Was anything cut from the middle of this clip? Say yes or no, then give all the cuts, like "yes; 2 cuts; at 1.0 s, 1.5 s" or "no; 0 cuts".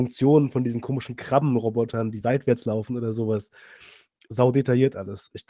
no; 0 cuts